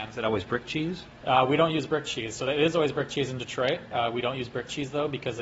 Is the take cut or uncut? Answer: uncut